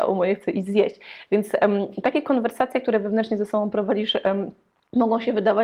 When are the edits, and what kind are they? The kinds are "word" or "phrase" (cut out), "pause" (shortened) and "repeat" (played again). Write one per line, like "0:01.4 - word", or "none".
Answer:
none